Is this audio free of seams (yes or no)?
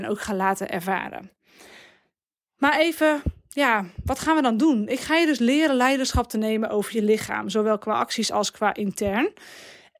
yes